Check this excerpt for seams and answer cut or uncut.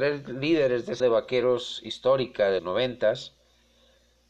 cut